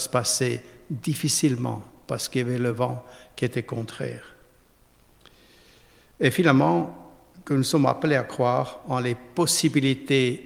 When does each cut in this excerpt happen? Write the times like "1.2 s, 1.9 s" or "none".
none